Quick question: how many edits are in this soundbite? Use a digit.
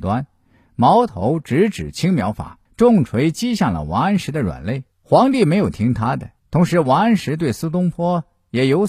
3